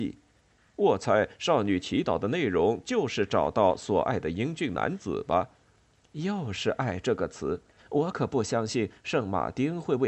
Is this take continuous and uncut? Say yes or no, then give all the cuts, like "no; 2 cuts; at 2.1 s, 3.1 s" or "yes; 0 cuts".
no; 1 cut; at 7.8 s